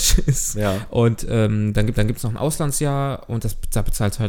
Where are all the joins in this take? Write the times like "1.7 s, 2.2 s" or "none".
1.9 s